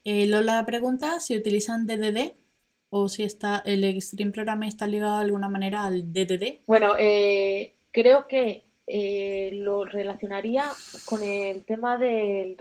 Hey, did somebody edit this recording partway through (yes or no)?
yes